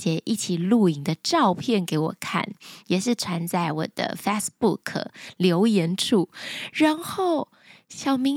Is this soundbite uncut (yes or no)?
yes